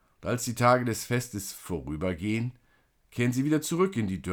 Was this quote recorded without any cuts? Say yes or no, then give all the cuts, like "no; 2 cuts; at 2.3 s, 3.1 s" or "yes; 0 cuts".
yes; 0 cuts